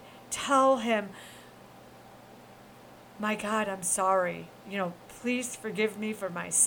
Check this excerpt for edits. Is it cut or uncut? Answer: uncut